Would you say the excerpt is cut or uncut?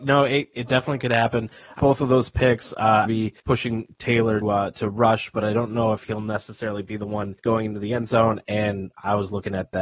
cut